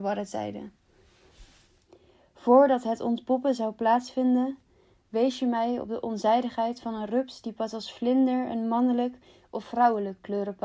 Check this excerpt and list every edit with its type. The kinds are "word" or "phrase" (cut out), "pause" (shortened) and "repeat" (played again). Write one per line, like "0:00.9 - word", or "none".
none